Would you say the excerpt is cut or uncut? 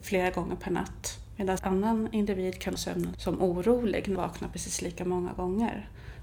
cut